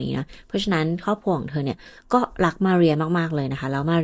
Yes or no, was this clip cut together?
no